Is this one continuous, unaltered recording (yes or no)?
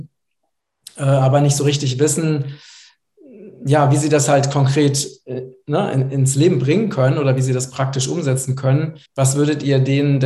no